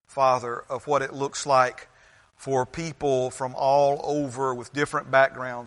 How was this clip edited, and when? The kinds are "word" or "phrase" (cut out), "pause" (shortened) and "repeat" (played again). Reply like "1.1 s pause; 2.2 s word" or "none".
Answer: none